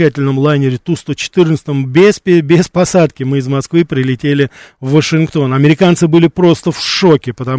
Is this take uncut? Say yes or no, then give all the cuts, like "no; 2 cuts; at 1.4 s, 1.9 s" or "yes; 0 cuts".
yes; 0 cuts